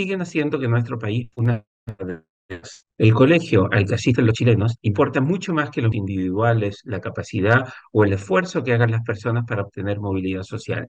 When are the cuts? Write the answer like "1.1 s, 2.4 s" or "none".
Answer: 1.3 s, 4.8 s, 5.9 s